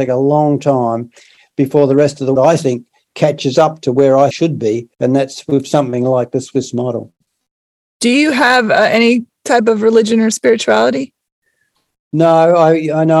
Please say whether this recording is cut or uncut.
cut